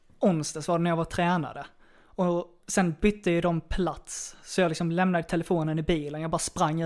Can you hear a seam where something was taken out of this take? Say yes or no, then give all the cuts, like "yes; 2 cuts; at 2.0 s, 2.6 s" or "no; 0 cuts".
yes; 1 cut; at 2.6 s